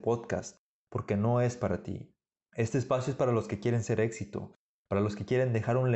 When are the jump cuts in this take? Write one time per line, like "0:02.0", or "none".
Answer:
none

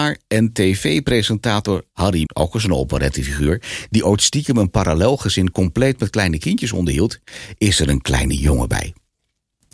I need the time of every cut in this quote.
0:02.3

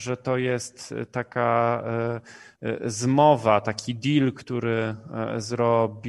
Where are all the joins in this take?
none

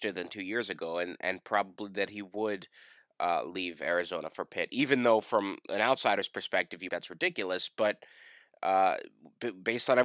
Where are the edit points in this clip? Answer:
0:06.9

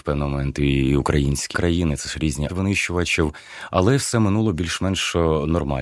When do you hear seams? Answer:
0:01.5
0:02.5

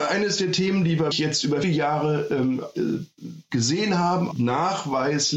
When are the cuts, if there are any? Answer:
0:01.1
0:01.6
0:04.3

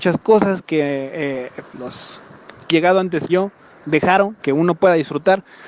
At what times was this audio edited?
0:01.7
0:02.7
0:03.3
0:04.4

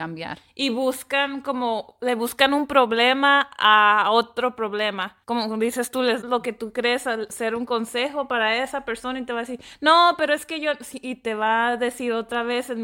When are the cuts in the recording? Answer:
0:05.2
0:06.2

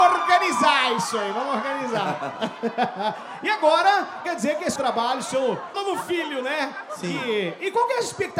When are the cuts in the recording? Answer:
0:04.2
0:04.8
0:05.7

